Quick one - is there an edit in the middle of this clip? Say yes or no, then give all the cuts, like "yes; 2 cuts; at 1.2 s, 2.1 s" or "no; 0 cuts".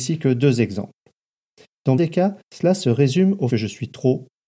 yes; 3 cuts; at 2.0 s, 2.4 s, 3.5 s